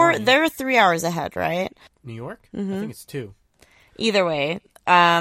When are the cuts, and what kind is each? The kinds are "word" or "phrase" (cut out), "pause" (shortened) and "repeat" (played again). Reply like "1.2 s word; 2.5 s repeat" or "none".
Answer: none